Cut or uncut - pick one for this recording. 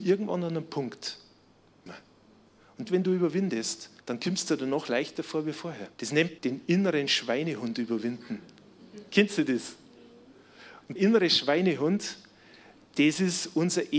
cut